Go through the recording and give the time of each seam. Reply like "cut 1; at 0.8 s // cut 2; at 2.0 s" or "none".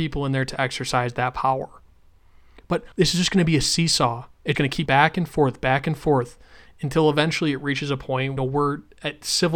cut 1; at 2.9 s // cut 2; at 4.5 s // cut 3; at 4.9 s // cut 4; at 8.4 s